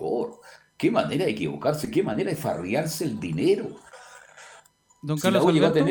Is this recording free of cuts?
yes; 0 cuts

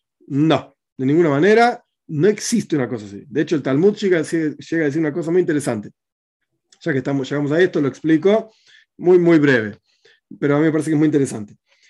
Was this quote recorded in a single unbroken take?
yes; 0 cuts

